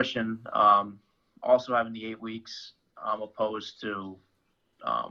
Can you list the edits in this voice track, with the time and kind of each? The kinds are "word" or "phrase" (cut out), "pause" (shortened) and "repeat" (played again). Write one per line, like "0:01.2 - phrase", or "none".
none